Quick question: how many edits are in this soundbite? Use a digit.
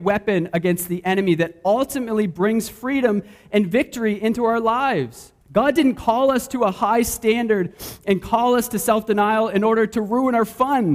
1